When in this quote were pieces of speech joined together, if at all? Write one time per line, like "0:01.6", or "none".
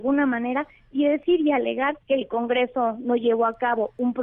0:02.0